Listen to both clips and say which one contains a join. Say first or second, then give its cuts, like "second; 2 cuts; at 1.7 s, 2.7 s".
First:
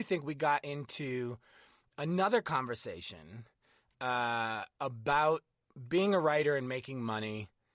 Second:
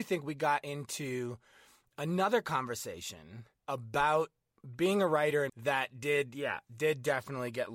second; 2 cuts; at 3.6 s, 5.5 s